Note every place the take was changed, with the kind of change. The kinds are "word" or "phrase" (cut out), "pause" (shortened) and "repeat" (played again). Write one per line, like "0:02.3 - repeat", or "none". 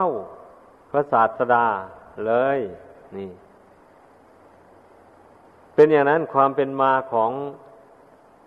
none

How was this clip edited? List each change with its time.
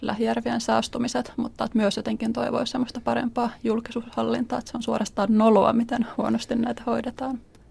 none

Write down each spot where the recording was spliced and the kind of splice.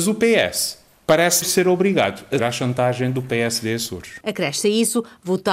0:01.4 - word
0:02.4 - word

